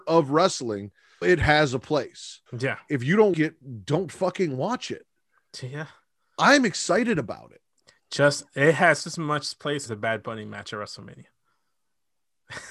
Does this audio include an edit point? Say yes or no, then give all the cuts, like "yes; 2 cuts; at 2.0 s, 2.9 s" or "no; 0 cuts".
yes; 5 cuts; at 1.2 s, 2.5 s, 3.3 s, 9.0 s, 9.9 s